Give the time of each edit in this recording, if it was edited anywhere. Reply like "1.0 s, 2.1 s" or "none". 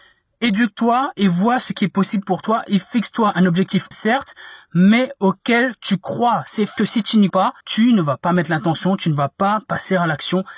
3.9 s, 6.8 s, 7.3 s, 7.6 s

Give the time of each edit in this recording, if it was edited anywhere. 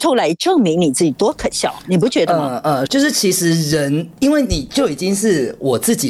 2.9 s

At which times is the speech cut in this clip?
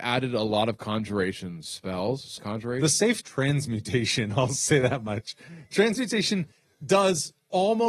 2.4 s, 3.2 s

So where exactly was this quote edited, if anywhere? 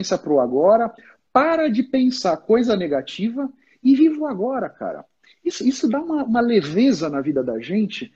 none

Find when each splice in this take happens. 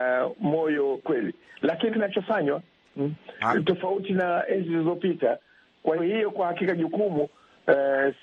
1.0 s, 1.9 s, 6.0 s

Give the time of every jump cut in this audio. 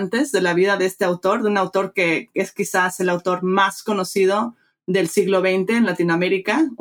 none

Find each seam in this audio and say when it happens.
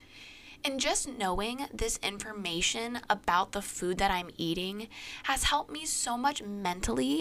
none

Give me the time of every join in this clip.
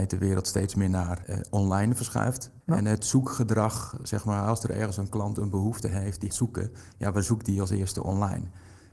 2.6 s, 6.3 s

